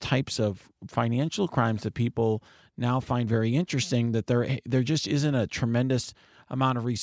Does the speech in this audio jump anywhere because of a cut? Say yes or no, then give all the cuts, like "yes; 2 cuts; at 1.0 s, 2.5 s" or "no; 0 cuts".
no; 0 cuts